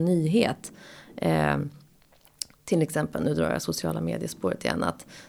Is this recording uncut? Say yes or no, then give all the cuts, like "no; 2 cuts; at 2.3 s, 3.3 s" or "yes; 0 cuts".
yes; 0 cuts